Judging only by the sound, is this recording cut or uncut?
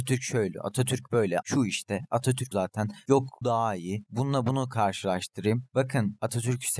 cut